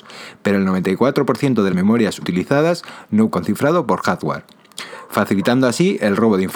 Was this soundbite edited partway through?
yes; 3 cuts; at 1.7 s, 2.2 s, 3.3 s

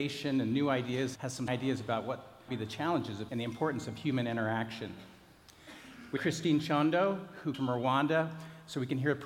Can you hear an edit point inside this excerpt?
yes; 6 cuts; at 1.2 s, 1.5 s, 2.5 s, 3.3 s, 6.2 s, 7.5 s

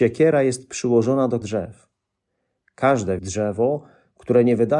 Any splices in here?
yes; 2 cuts; at 1.4 s, 3.2 s

